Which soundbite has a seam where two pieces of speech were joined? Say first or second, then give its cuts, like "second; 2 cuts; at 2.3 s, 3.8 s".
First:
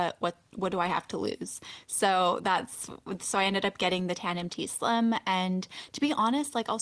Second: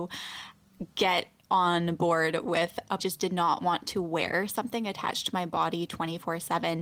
second; 1 cut; at 3.0 s